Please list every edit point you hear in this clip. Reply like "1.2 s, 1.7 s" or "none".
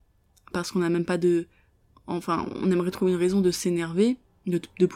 none